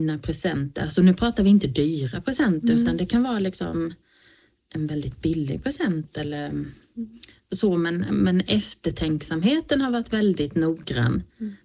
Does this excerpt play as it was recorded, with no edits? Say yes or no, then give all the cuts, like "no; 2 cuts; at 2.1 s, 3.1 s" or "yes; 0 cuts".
yes; 0 cuts